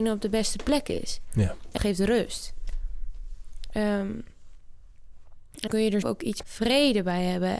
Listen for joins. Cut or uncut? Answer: cut